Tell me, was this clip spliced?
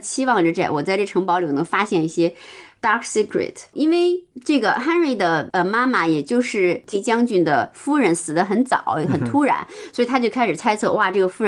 yes; 1 cut; at 6.9 s

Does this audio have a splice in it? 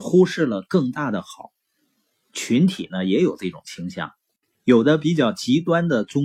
no; 0 cuts

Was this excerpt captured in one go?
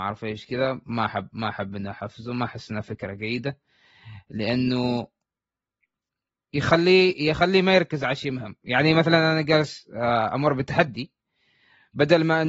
yes; 0 cuts

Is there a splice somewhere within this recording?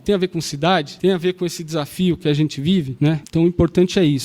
no; 0 cuts

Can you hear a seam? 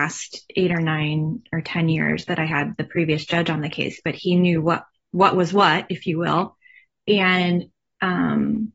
no; 0 cuts

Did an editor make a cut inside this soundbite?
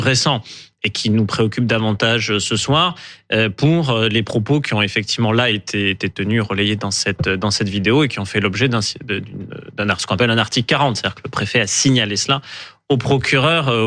no; 0 cuts

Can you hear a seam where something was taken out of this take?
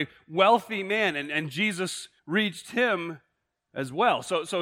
yes; 1 cut; at 2.2 s

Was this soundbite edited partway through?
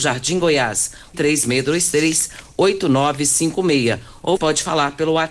yes; 2 cuts; at 1.1 s, 4.4 s

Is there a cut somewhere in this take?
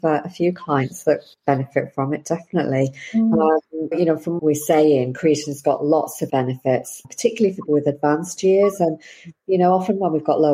yes; 6 cuts; at 1.3 s, 3.9 s, 4.4 s, 6.3 s, 7.0 s, 7.7 s

